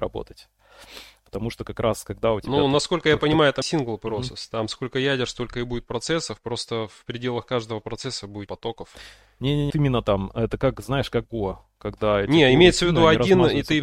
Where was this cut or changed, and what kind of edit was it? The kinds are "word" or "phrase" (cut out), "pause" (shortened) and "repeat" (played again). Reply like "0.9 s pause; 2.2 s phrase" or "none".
3.6 s word; 8.5 s word; 9.7 s word; 11.2 s word